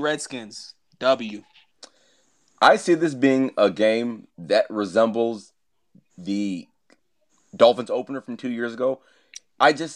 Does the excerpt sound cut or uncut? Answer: uncut